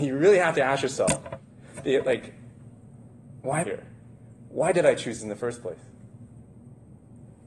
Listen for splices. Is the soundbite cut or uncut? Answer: cut